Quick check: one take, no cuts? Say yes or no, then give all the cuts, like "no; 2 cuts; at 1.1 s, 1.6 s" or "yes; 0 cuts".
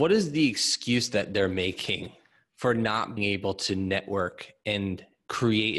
no; 1 cut; at 3.2 s